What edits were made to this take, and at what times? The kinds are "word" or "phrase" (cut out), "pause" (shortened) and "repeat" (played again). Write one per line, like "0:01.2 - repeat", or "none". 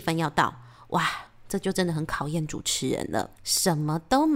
0:03.3 - pause